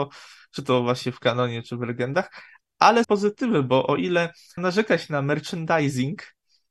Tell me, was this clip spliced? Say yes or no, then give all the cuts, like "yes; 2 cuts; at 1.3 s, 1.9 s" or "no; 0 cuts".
yes; 3 cuts; at 1.6 s, 3.0 s, 4.6 s